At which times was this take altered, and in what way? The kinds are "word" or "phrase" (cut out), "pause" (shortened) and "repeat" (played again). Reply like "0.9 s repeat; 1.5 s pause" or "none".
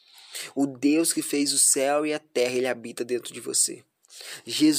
none